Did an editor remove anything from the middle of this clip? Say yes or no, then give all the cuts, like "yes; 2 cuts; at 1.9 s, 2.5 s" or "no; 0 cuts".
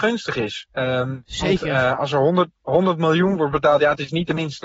no; 0 cuts